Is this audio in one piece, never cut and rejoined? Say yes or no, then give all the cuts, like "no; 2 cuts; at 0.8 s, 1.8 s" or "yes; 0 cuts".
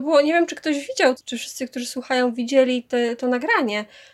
no; 1 cut; at 1.2 s